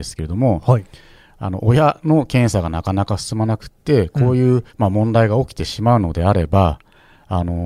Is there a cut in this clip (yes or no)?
yes